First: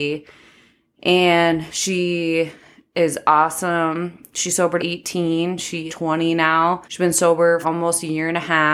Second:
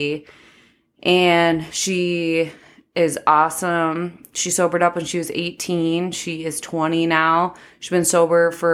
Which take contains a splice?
first; 4 cuts; at 4.8 s, 5.9 s, 6.8 s, 7.6 s

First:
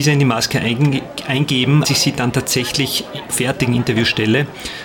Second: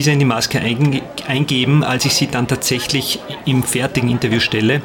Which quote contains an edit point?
first; 2 cuts; at 1.8 s, 3.3 s

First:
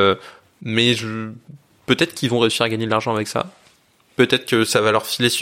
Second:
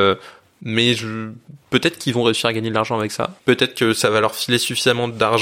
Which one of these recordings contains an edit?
second; 2 cuts; at 1.6 s, 3.4 s

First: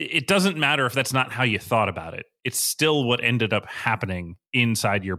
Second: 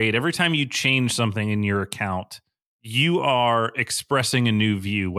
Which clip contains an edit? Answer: second; 1 cut; at 2.6 s

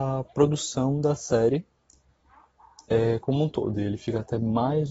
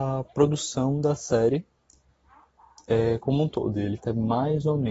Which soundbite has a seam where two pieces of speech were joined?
second; 1 cut; at 4.0 s

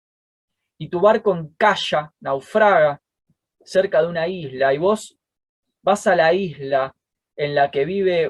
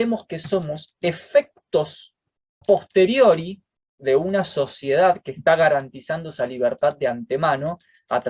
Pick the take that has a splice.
second; 1 cut; at 2.6 s

